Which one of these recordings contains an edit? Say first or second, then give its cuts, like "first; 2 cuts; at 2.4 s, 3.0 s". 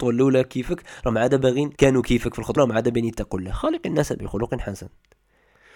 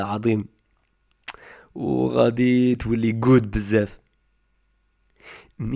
first; 2 cuts; at 1.7 s, 2.6 s